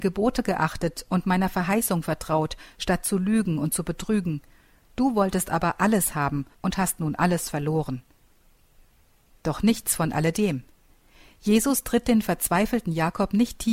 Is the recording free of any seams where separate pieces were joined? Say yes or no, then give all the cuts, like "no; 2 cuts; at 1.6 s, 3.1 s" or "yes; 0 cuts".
no; 1 cut; at 6.5 s